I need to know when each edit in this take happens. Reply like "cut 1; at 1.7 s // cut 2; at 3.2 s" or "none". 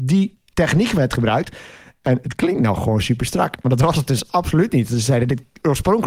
none